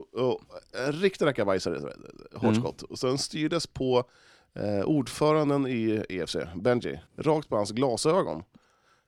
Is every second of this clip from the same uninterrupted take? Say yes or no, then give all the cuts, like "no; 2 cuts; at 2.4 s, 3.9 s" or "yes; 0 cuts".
no; 1 cut; at 7.1 s